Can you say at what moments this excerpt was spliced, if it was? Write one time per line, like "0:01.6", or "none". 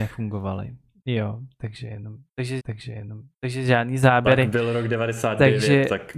0:02.6